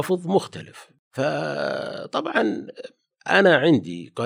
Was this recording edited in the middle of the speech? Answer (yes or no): no